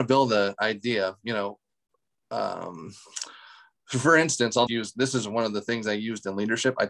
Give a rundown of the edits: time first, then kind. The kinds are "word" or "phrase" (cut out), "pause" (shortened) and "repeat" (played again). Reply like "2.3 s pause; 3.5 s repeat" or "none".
4.7 s word

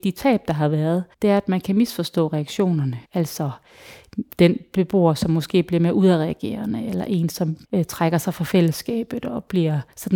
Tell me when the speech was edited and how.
1.1 s pause; 3.0 s pause; 7.6 s pause

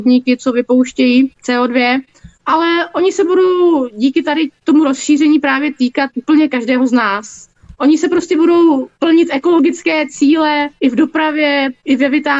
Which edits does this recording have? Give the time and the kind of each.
none

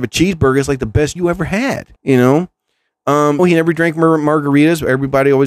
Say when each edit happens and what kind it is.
1.2 s word; 2.0 s pause; 3.4 s word

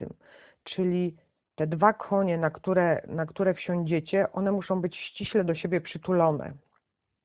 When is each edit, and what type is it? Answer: none

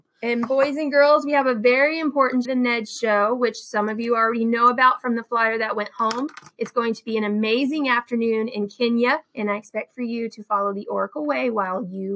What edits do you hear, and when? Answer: 2.4 s phrase; 9.3 s pause

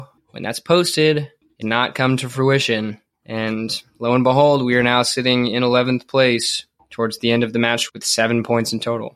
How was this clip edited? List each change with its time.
1.6 s word; 7.9 s word

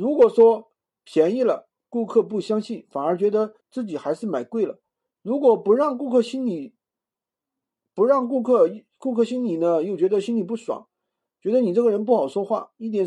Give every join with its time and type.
3.6 s pause

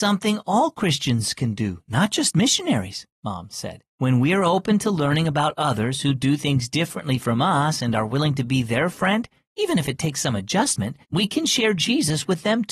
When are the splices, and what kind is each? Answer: 3.9 s pause; 11.0 s pause

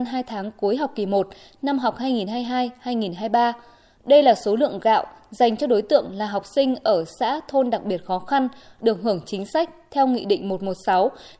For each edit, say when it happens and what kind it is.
none

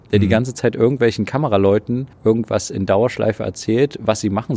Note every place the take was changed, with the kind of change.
2.1 s pause

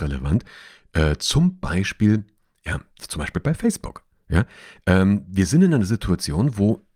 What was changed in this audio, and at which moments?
none

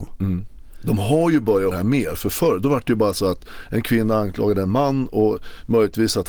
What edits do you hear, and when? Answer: 1.7 s word

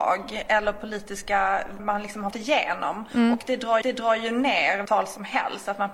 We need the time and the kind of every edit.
1.8 s word; 2.3 s word; 3.8 s repeat; 4.9 s word

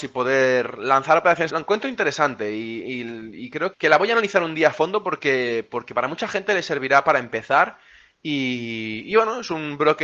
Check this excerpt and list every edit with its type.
1.5 s phrase; 3.7 s word

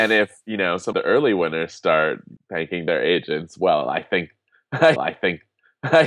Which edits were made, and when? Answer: 0.9 s word; 2.4 s pause; 5.0 s repeat

